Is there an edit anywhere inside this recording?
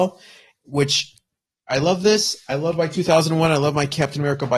no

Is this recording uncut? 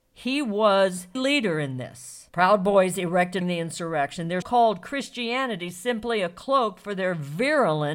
no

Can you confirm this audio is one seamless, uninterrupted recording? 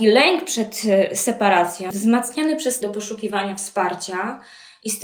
no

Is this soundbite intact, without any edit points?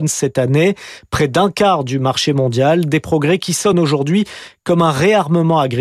yes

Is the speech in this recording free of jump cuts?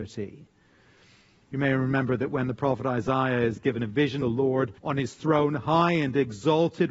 no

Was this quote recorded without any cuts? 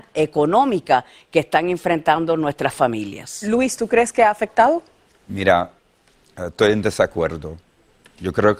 yes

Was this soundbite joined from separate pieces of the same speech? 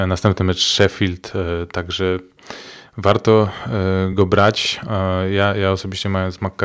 no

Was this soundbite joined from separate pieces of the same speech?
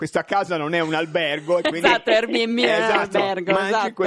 no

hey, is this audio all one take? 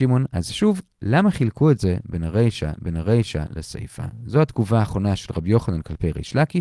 no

